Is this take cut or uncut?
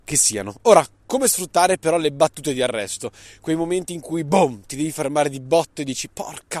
uncut